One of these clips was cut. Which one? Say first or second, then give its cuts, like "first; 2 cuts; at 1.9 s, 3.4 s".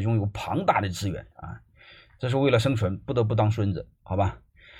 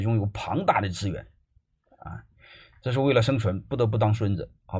first; 1 cut; at 1.3 s